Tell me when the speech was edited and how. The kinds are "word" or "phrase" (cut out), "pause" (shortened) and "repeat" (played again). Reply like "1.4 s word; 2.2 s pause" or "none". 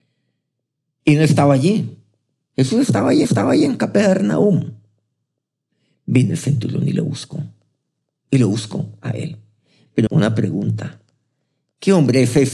3.2 s repeat; 10.1 s phrase